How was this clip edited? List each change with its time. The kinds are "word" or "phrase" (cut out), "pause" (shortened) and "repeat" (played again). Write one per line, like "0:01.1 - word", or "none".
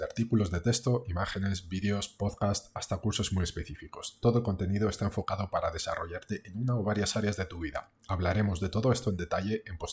none